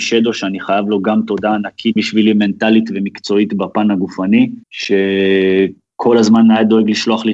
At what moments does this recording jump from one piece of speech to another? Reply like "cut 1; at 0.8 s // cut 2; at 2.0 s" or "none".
cut 1; at 2.0 s // cut 2; at 4.6 s